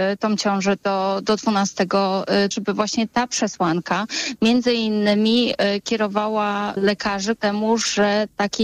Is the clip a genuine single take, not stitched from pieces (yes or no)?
no